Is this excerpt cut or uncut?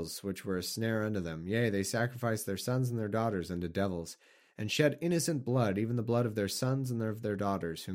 uncut